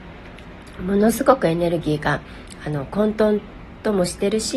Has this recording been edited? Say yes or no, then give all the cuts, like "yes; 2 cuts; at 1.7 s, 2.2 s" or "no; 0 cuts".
no; 0 cuts